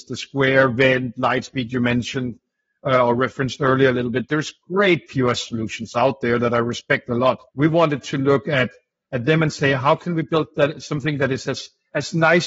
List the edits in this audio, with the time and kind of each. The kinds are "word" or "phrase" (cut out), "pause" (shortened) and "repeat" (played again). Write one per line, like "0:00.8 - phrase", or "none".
0:07.5 - pause